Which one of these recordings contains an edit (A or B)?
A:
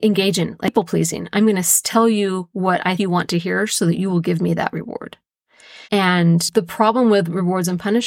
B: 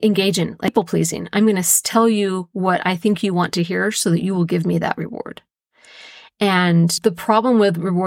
A